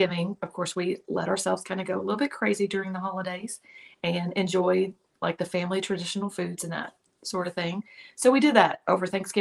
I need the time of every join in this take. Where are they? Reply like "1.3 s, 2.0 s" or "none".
none